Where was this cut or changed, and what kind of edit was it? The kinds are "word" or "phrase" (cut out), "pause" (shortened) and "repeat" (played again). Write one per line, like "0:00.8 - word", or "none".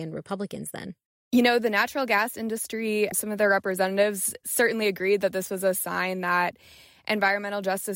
none